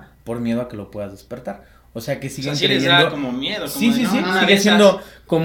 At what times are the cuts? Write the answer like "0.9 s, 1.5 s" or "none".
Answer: none